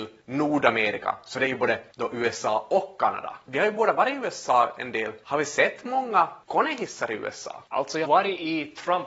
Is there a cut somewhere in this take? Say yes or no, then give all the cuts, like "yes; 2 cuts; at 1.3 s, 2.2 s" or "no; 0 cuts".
yes; 1 cut; at 8.0 s